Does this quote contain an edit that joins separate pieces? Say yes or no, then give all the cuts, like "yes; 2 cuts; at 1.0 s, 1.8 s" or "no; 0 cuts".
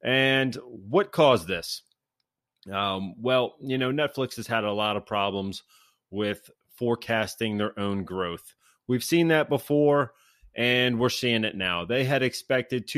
no; 0 cuts